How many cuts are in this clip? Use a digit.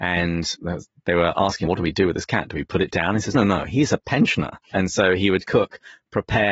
4